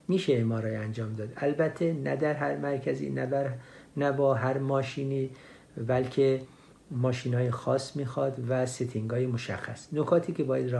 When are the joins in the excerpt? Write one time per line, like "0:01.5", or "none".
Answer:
none

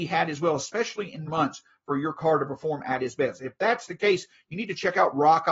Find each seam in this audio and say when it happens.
0:01.3

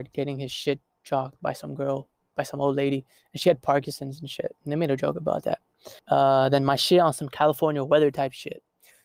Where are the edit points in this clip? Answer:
0:03.2
0:06.0

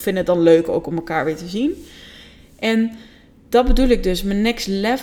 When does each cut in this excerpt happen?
none

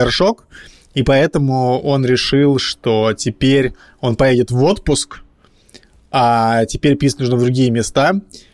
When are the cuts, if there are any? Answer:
none

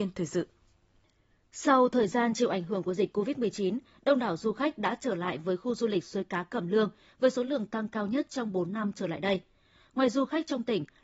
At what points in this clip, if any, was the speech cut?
none

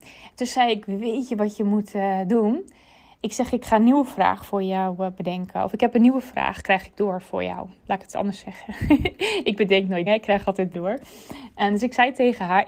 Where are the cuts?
0:10.1
0:10.7

